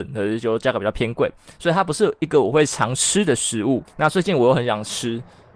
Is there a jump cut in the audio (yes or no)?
yes